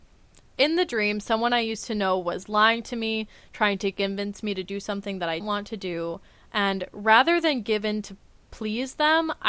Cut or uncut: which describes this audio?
cut